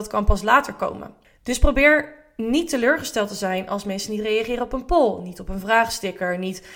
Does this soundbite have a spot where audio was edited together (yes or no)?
no